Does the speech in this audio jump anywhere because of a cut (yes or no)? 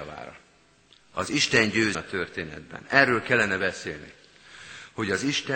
yes